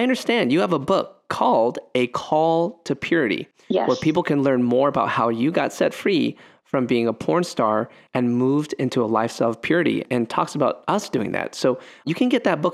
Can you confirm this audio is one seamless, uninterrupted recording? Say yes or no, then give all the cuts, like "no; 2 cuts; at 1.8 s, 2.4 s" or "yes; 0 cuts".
yes; 0 cuts